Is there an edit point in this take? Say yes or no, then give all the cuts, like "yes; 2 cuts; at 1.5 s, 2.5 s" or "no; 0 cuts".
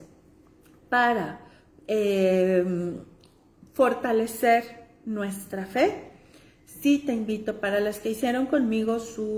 no; 0 cuts